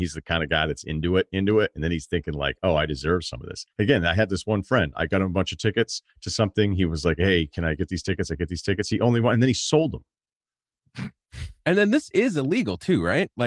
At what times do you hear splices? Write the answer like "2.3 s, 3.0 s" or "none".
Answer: 3.7 s, 6.1 s